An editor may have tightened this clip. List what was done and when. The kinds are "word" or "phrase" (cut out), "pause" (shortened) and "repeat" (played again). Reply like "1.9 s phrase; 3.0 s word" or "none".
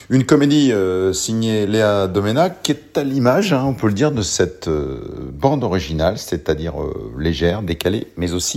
none

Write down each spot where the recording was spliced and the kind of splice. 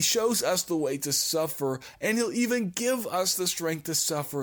none

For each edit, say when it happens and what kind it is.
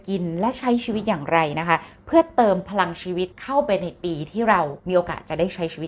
3.3 s pause; 4.8 s pause

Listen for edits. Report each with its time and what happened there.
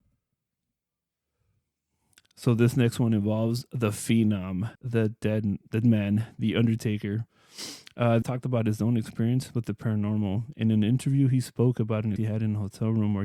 4.8 s pause; 5.8 s word; 8.2 s phrase; 12.2 s word

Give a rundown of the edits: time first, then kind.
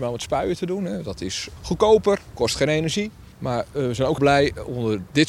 1.6 s word; 3.3 s pause; 4.2 s word

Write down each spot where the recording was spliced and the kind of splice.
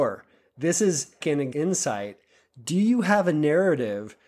1.2 s phrase; 1.5 s word

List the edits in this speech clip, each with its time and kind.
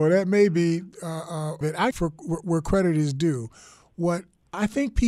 1.6 s phrase; 1.9 s phrase

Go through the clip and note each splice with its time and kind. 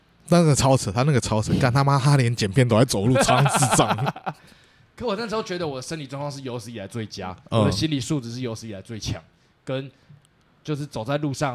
none

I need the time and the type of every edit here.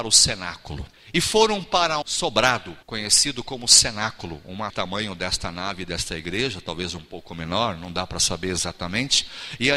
0.9 s pause; 2.0 s word; 2.8 s pause; 4.7 s phrase

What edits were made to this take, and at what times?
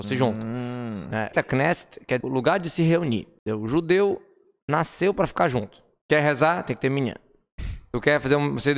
1.3 s word; 2.2 s word

